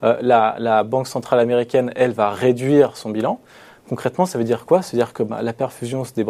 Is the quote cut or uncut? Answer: uncut